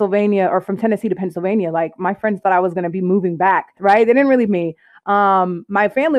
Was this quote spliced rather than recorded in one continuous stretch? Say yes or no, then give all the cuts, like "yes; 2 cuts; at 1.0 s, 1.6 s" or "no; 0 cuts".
yes; 2 cuts; at 3.8 s, 4.5 s